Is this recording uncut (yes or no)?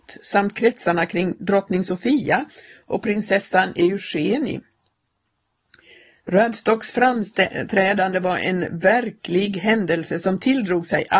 yes